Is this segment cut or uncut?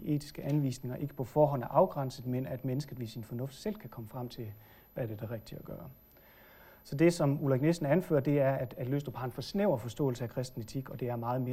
uncut